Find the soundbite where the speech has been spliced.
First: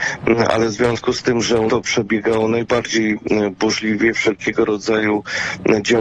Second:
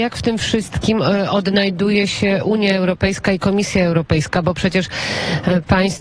first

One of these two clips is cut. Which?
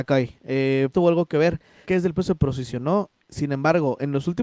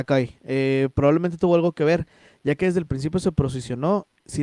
first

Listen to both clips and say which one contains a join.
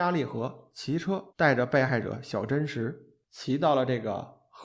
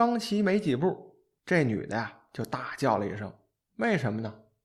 first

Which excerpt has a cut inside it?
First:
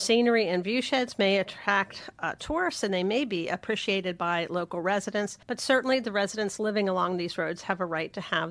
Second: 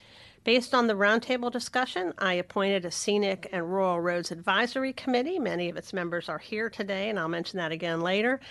first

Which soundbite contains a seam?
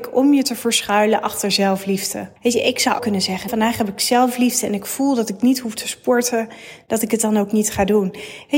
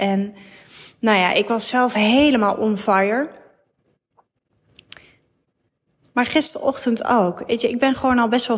first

